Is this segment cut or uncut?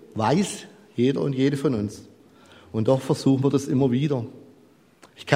uncut